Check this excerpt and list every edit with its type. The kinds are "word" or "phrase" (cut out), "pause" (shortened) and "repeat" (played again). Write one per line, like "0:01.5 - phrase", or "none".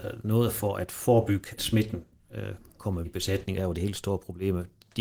0:01.6 - word
0:03.0 - word
0:03.6 - word